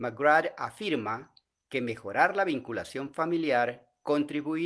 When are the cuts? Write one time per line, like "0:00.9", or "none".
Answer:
none